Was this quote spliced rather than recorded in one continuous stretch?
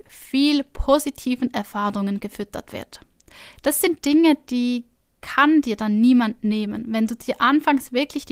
no; 0 cuts

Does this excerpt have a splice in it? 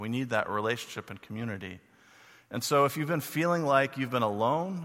no; 0 cuts

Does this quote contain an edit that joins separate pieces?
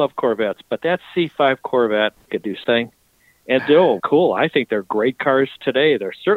yes; 4 cuts; at 2.3 s, 2.6 s, 3.6 s, 4.0 s

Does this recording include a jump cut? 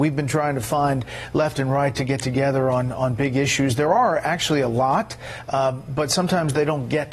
no; 0 cuts

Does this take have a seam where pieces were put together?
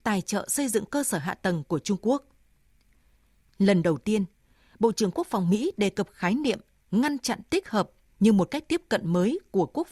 no; 0 cuts

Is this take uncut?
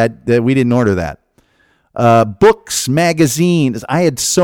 yes; 0 cuts

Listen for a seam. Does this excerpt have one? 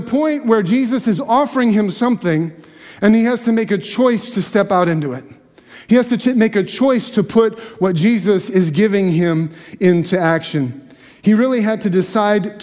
no; 0 cuts

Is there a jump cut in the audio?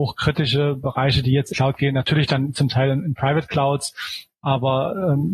yes; 1 cut; at 1.5 s

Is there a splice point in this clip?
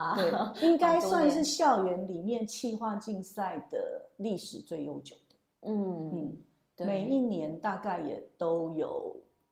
no; 0 cuts

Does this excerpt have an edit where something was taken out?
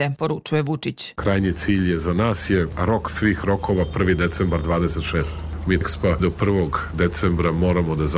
yes; 2 cuts; at 5.8 s, 6.2 s

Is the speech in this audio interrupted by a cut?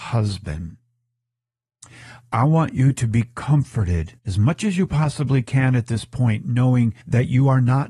yes; 2 cuts; at 4.2 s, 7.0 s

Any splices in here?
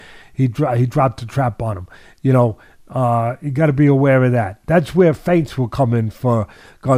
no; 0 cuts

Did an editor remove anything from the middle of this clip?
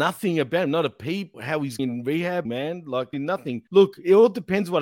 yes; 5 cuts; at 1.3 s, 1.8 s, 2.4 s, 3.1 s, 3.7 s

